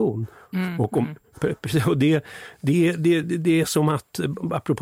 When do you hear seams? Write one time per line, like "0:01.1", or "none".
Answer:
none